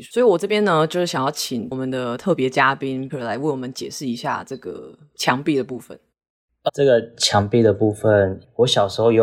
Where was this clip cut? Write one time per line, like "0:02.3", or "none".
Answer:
0:03.1
0:06.7